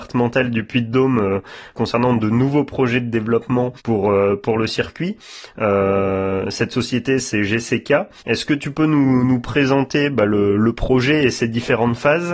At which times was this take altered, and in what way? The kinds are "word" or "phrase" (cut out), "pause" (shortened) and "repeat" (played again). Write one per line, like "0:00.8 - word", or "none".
0:03.8 - pause
0:08.2 - pause